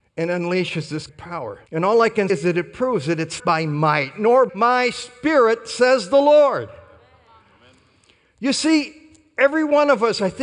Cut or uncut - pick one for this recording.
cut